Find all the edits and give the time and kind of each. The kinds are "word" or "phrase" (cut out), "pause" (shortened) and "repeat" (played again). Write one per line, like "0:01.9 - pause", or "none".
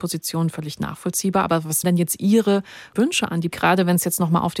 0:01.8 - word
0:03.0 - word
0:03.5 - word